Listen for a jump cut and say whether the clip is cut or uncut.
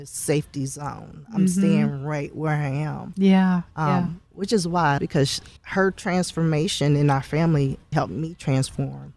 cut